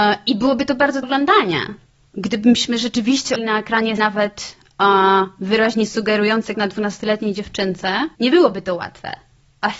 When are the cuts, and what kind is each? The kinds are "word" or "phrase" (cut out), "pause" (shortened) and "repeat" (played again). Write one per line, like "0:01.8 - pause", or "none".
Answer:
0:01.0 - phrase
0:01.9 - pause
0:03.4 - word
0:04.0 - word
0:06.5 - word
0:08.1 - pause

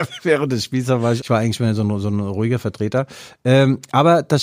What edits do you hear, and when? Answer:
0:01.2 - word

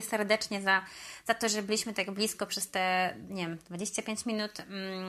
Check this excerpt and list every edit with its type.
none

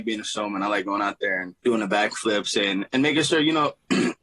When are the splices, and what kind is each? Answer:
0:01.6 - pause

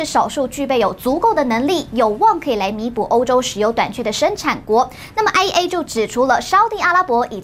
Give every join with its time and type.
none

